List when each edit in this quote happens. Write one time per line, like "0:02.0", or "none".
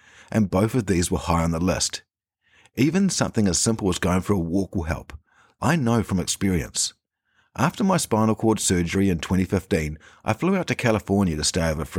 none